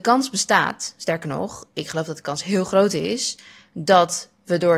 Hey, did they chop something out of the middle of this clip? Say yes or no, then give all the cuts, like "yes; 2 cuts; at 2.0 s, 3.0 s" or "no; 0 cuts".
no; 0 cuts